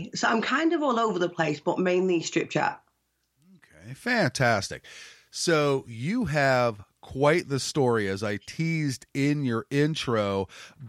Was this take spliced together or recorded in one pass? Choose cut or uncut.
uncut